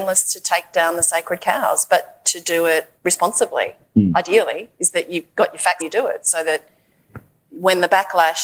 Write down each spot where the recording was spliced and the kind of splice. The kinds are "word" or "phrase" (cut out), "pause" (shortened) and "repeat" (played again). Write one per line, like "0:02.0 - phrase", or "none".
0:03.0 - pause
0:05.8 - phrase